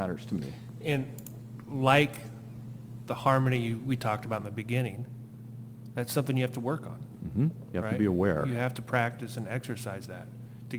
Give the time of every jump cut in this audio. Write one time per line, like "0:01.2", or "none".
none